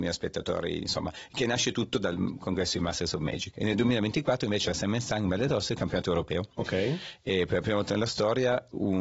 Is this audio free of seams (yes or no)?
yes